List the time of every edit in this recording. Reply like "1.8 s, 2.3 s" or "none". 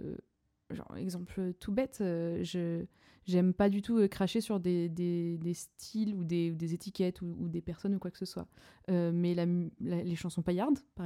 none